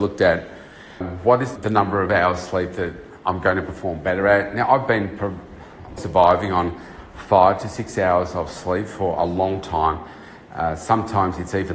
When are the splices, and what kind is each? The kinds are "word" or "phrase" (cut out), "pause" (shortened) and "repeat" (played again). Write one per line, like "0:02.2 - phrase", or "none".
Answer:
0:01.0 - word
0:01.6 - word
0:06.0 - word

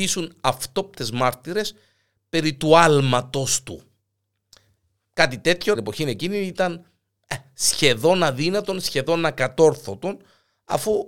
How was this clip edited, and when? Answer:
0:05.7 - phrase

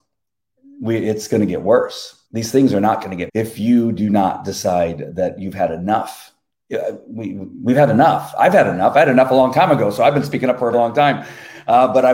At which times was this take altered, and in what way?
0:02.3 - pause
0:03.3 - word
0:10.7 - word

